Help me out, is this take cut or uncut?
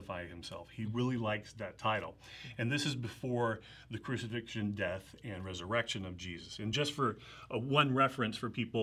uncut